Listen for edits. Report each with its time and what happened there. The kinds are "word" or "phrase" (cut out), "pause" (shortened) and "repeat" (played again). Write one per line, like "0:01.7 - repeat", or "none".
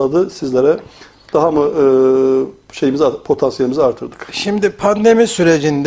none

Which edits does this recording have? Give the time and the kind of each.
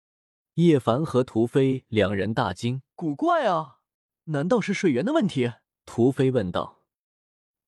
0:02.9 - pause
0:03.9 - pause
0:05.8 - pause

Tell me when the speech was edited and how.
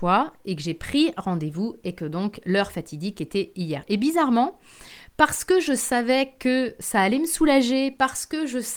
none

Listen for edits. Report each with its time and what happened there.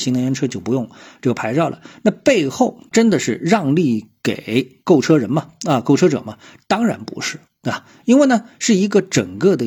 none

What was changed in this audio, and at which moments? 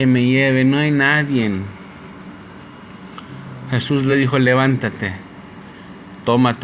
none

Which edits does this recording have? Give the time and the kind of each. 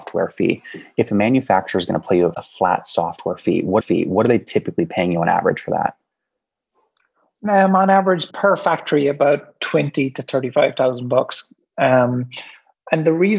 0:02.3 - word
0:03.8 - repeat
0:08.3 - word

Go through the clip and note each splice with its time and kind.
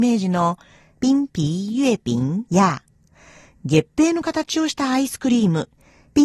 0:02.5 - pause

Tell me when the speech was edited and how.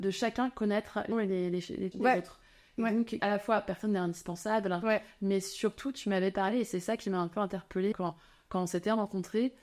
0:01.1 - word
0:01.9 - word
0:03.2 - word
0:07.9 - word

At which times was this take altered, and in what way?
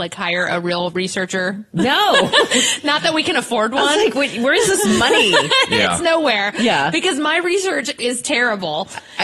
none

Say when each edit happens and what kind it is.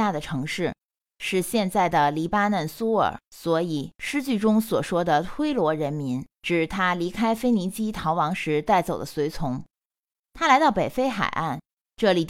0:03.2 - pause

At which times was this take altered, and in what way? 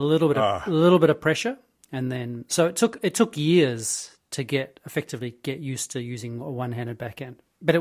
none

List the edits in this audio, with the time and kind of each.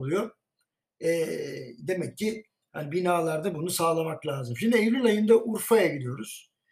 none

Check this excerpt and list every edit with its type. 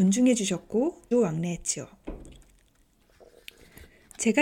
0:01.1 - word

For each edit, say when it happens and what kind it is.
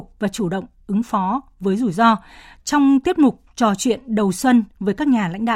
none

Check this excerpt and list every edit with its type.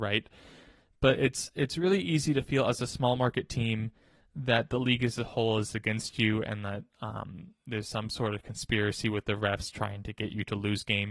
none

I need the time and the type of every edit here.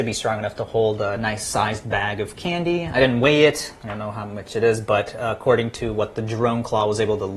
none

